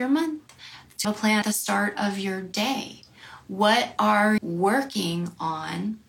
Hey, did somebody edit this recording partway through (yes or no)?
yes